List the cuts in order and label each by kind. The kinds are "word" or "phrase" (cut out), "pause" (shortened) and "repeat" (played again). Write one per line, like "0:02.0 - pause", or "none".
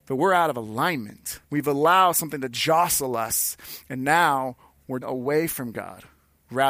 0:01.4 - pause
0:05.0 - word